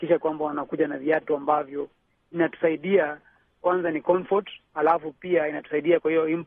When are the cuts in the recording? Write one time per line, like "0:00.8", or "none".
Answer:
none